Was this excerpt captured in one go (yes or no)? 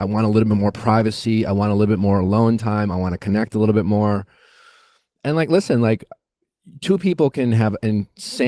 yes